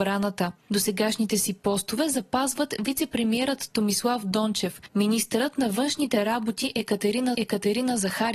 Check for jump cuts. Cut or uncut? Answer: cut